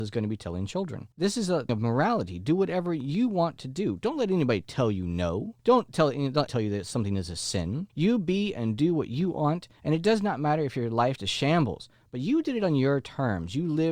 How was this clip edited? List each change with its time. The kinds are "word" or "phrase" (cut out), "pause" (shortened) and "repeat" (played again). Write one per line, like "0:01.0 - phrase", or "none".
0:01.1 - pause
0:01.7 - word
0:05.6 - pause
0:06.5 - word
0:07.9 - pause
0:11.2 - word